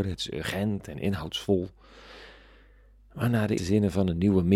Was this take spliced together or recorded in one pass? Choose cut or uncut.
cut